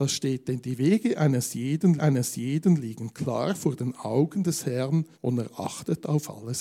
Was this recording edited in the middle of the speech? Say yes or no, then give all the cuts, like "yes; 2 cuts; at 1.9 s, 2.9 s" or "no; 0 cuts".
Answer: yes; 2 cuts; at 2.0 s, 5.1 s